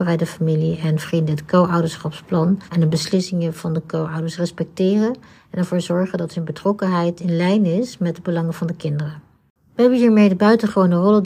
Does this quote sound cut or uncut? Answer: cut